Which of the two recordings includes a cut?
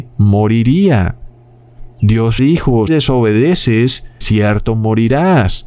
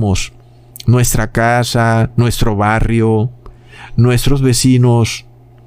first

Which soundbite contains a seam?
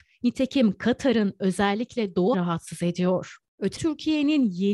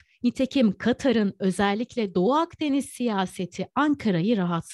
first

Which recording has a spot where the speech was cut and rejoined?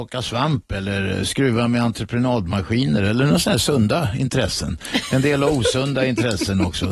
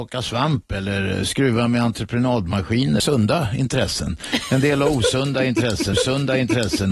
second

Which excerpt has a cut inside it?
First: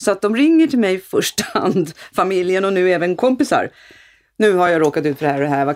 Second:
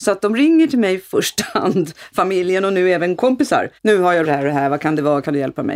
second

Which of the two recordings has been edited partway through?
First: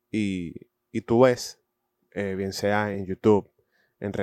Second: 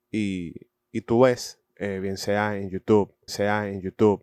second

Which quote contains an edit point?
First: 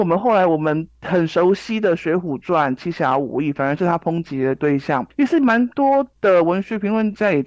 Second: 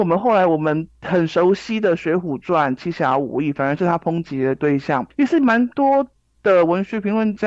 first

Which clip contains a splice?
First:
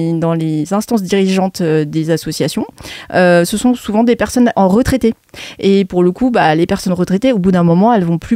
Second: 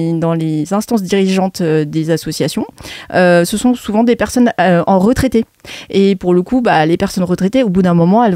first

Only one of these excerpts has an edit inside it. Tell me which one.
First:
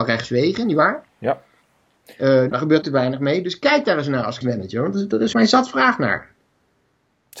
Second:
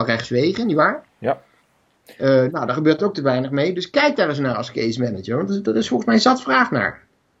first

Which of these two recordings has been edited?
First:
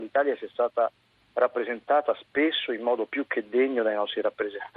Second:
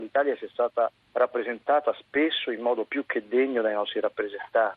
second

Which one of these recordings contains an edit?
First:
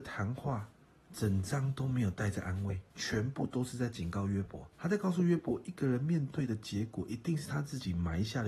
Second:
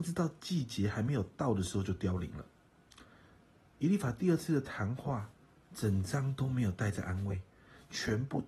first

